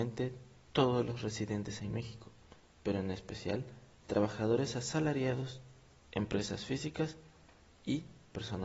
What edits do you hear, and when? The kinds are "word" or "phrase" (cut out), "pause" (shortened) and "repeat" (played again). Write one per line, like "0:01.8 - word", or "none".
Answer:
none